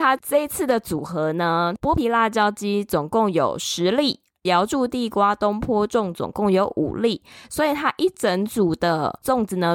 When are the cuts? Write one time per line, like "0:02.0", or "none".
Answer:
none